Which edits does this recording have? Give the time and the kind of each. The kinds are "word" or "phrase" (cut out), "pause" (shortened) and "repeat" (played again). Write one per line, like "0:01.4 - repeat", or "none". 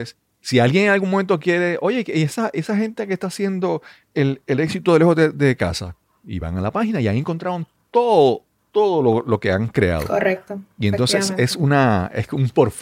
none